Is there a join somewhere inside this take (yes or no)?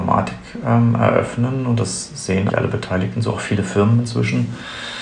yes